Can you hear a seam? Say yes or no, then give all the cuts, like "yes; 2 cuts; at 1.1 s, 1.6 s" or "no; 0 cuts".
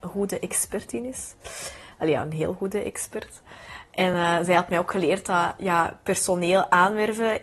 no; 0 cuts